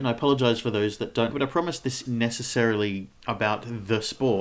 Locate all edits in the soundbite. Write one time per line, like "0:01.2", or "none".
0:01.3
0:02.0
0:03.2